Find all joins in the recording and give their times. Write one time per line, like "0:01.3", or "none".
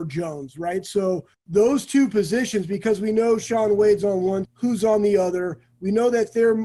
0:01.3
0:04.4